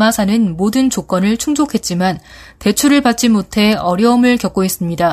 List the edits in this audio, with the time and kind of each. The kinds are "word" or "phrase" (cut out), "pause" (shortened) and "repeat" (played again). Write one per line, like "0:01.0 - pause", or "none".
none